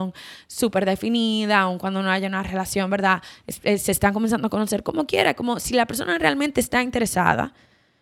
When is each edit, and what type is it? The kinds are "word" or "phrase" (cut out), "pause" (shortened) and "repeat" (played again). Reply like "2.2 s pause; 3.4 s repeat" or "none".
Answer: none